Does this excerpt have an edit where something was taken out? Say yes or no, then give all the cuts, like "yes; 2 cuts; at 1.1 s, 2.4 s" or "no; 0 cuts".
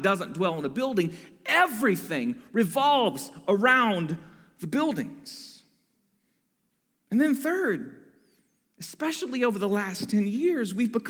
no; 0 cuts